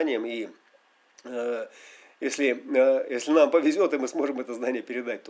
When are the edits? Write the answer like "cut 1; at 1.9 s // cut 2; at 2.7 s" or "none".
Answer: none

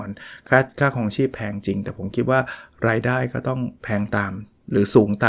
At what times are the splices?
cut 1; at 3.8 s

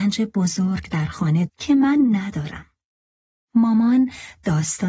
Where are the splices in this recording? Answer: cut 1; at 1.5 s

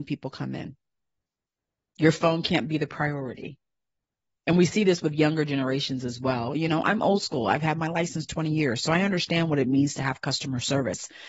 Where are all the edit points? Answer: none

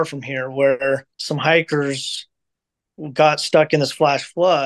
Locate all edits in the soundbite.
cut 1; at 1.1 s

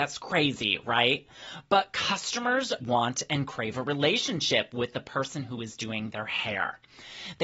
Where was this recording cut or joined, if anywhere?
cut 1; at 2.8 s

